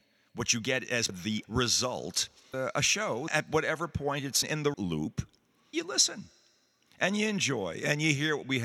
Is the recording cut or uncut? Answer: cut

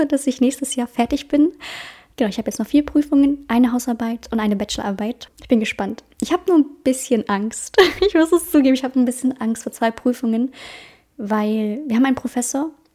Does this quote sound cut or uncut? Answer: uncut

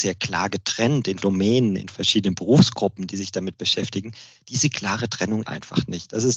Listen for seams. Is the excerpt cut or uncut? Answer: cut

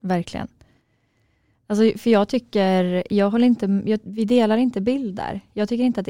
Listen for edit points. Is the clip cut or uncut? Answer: uncut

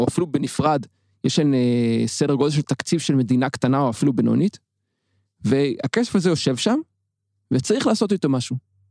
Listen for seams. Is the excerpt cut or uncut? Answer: uncut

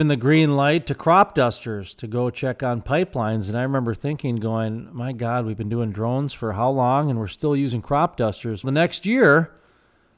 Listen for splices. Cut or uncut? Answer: cut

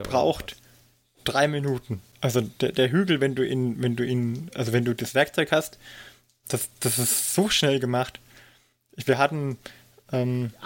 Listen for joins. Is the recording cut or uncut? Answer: uncut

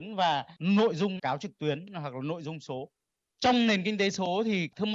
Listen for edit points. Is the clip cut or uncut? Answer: cut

